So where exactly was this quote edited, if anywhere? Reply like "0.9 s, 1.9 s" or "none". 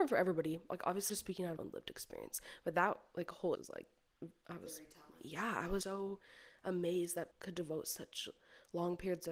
1.1 s, 1.6 s, 3.5 s, 5.8 s, 7.3 s